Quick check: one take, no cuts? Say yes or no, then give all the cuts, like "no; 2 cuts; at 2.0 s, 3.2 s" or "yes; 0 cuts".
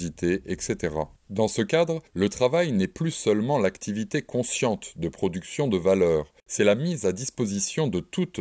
no; 3 cuts; at 1.2 s, 2.1 s, 6.4 s